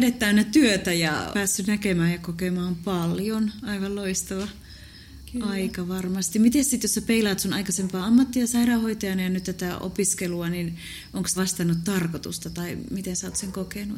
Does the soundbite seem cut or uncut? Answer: cut